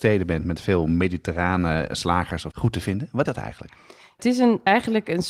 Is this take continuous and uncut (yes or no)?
no